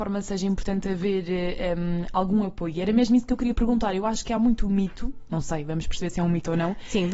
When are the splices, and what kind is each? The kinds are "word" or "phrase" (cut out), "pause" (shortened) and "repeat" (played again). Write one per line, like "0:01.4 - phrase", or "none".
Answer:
none